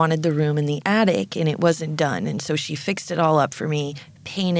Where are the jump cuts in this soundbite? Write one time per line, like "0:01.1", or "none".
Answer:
none